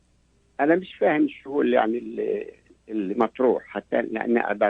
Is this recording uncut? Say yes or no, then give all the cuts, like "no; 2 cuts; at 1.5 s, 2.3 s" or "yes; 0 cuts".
yes; 0 cuts